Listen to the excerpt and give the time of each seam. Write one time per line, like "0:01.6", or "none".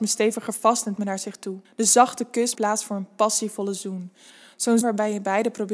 0:01.0
0:02.6
0:04.8